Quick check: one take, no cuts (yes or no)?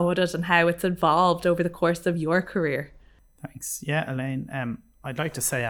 yes